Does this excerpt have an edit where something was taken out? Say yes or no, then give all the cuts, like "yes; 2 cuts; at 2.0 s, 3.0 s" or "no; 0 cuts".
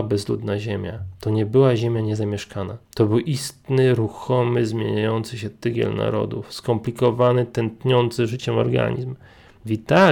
yes; 1 cut; at 2.8 s